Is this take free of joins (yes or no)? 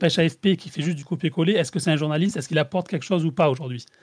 yes